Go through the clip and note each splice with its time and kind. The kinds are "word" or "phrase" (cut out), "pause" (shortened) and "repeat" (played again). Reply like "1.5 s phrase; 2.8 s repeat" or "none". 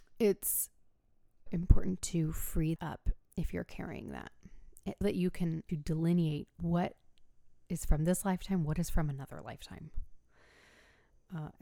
1.5 s word; 2.8 s word; 3.2 s pause; 5.0 s word; 5.7 s phrase; 6.6 s word